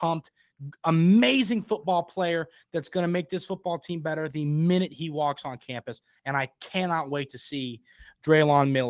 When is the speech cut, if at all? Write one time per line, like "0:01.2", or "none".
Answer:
none